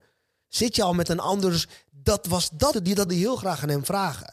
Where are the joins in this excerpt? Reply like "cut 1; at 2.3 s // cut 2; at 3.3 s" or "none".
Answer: cut 1; at 2.7 s // cut 2; at 3.1 s